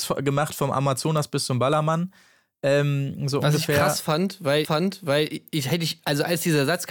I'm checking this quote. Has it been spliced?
yes; 1 cut; at 4.6 s

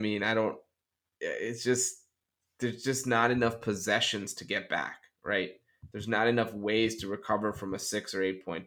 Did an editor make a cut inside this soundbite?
no; 0 cuts

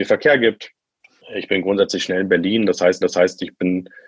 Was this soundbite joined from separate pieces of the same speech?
yes; 1 cut; at 3.0 s

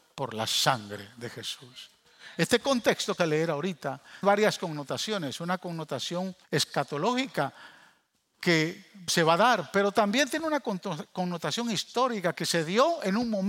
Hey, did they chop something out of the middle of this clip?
yes; 4 cuts; at 3.2 s, 4.2 s, 6.4 s, 9.1 s

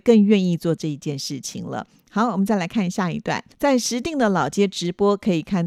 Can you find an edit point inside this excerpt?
yes; 1 cut; at 3.5 s

